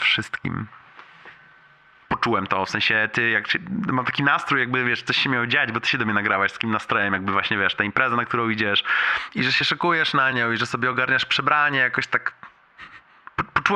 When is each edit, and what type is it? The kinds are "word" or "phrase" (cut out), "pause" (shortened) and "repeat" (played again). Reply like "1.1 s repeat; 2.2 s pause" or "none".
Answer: none